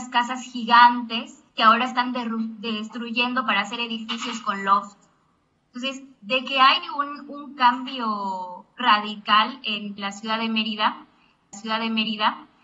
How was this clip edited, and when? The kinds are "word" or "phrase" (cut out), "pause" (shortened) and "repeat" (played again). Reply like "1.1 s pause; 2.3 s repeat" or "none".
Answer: 1.5 s pause; 6.1 s pause; 10.0 s phrase; 11.5 s repeat